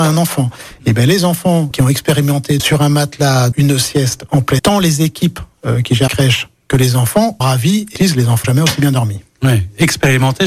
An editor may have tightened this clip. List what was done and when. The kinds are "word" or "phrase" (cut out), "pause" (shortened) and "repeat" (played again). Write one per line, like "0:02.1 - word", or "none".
0:01.7 - word
0:02.6 - word
0:03.5 - word
0:04.6 - word
0:06.1 - word
0:07.4 - word
0:08.0 - word
0:08.4 - word